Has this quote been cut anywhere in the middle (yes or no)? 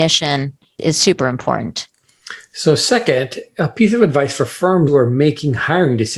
yes